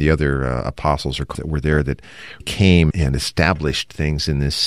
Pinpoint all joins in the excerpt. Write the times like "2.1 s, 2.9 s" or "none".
1.3 s, 2.4 s